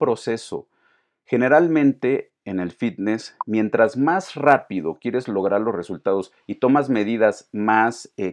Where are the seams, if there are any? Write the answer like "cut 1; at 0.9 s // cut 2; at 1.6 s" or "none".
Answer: none